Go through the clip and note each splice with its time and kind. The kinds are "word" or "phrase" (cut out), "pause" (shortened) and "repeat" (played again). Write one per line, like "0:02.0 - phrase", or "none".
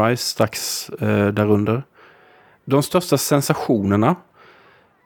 none